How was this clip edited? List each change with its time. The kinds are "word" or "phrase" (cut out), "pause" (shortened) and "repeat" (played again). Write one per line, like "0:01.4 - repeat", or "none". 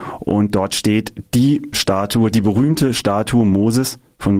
0:01.7 - word